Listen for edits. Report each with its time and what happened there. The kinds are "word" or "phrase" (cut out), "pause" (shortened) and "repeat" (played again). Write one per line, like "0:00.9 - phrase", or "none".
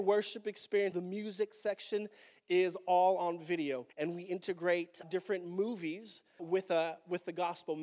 0:00.9 - phrase
0:03.9 - pause
0:05.0 - word
0:06.4 - word